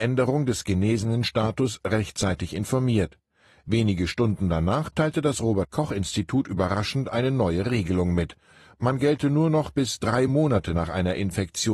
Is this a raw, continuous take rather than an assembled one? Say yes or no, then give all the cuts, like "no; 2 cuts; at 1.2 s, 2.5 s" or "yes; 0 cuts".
yes; 0 cuts